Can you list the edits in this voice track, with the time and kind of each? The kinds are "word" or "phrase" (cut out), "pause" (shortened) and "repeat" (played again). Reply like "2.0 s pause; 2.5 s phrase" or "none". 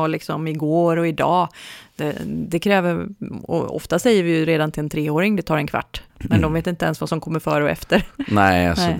6.1 s pause